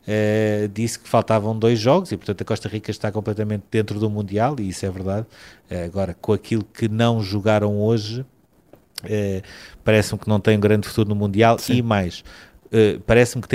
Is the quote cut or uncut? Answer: uncut